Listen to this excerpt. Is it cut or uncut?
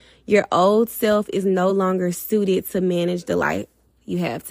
uncut